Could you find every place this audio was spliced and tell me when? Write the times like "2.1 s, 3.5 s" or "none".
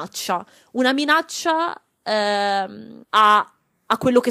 3.0 s